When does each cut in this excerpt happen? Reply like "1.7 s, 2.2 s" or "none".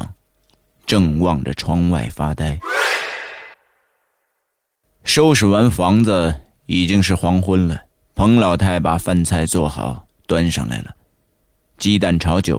3.5 s, 7.9 s